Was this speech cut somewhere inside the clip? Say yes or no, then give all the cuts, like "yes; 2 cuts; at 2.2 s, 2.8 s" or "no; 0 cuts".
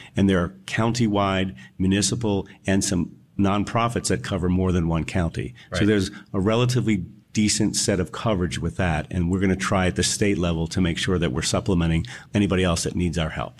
yes; 1 cut; at 12.3 s